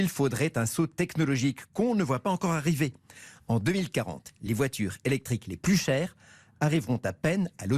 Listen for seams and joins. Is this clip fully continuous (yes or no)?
yes